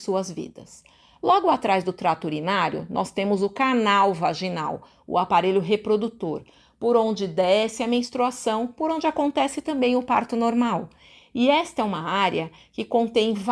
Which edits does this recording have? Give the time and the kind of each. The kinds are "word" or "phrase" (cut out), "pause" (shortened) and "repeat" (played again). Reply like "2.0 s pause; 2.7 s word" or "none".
none